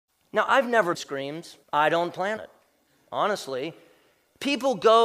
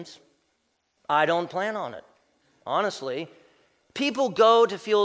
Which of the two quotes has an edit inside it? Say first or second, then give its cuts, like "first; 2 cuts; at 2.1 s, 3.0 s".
first; 3 cuts; at 0.9 s, 1.6 s, 2.4 s